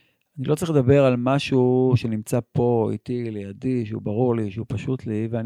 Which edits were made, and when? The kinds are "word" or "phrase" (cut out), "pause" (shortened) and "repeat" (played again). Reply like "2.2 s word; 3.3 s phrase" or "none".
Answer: none